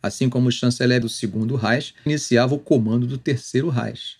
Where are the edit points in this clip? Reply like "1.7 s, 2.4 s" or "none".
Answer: 1.0 s, 2.1 s